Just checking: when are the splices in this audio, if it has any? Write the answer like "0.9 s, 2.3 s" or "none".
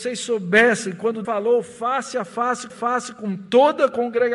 1.2 s, 2.7 s